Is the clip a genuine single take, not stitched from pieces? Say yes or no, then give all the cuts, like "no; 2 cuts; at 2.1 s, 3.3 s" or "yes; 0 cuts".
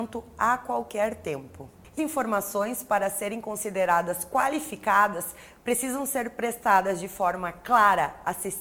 no; 1 cut; at 2.0 s